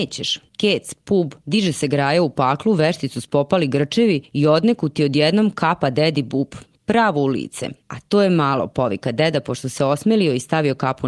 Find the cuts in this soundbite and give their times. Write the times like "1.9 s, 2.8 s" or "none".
1.4 s, 7.8 s